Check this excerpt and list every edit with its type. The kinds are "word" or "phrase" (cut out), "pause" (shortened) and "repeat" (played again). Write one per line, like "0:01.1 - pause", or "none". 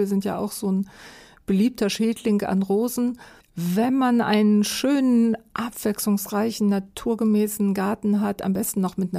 0:03.4 - pause